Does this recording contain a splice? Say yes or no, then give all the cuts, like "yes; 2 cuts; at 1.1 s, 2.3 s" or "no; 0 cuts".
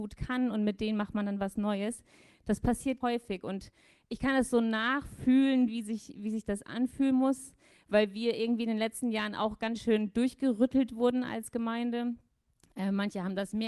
yes; 1 cut; at 3.0 s